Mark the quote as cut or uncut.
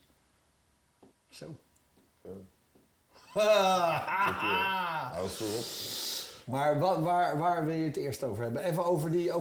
cut